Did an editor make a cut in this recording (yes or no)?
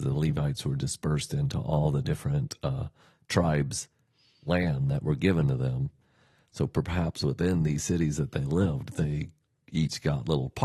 no